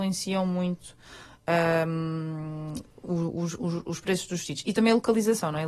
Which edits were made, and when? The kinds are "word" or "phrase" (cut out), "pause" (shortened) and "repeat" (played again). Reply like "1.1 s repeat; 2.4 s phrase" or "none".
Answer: none